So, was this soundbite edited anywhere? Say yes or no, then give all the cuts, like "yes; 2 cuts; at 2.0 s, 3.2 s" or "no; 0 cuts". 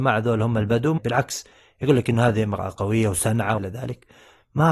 yes; 2 cuts; at 1.0 s, 3.6 s